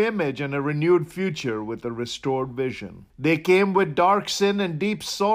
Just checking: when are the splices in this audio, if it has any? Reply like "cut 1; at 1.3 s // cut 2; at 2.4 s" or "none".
cut 1; at 3.1 s

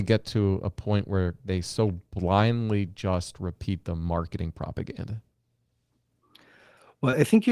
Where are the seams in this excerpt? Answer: none

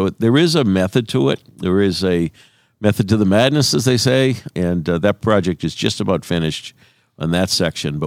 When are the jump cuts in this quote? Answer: none

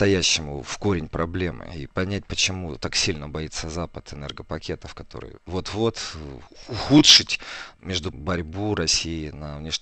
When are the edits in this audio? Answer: cut 1; at 5.5 s // cut 2; at 8.1 s

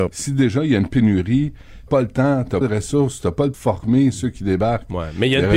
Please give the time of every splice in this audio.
cut 1; at 1.9 s // cut 2; at 2.6 s // cut 3; at 3.5 s

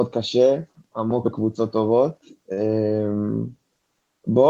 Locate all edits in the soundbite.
cut 1; at 1.2 s

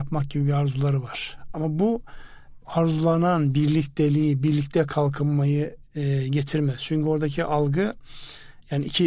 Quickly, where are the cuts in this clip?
cut 1; at 2.6 s

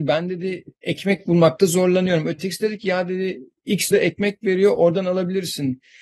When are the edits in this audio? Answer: cut 1; at 3.9 s

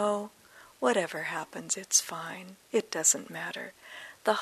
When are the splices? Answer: none

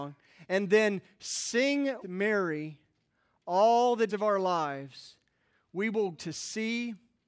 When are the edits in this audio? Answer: cut 1; at 2.0 s // cut 2; at 4.1 s // cut 3; at 6.1 s

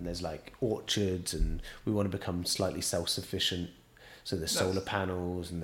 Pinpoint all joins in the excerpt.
none

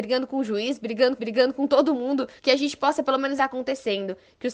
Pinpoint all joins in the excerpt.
cut 1; at 1.2 s // cut 2; at 2.4 s // cut 3; at 3.4 s

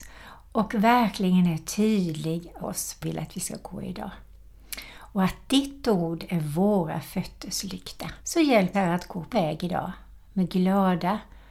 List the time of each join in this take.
cut 1; at 2.6 s // cut 2; at 3.0 s // cut 3; at 8.2 s // cut 4; at 8.7 s // cut 5; at 9.3 s

